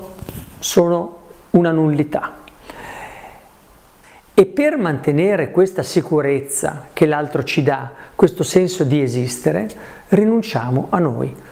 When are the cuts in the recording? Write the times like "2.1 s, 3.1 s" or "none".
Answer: none